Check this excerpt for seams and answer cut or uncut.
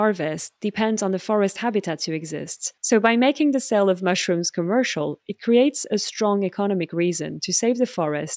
cut